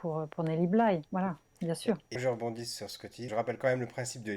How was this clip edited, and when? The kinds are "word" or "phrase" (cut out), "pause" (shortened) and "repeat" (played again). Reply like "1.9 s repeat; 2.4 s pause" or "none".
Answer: 1.1 s pause; 2.1 s word; 3.3 s word